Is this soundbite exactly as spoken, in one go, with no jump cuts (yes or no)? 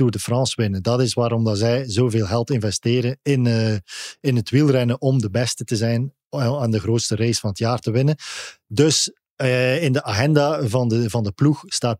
yes